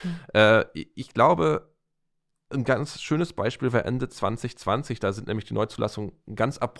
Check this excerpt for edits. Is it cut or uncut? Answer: uncut